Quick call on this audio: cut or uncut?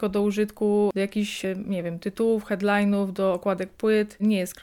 uncut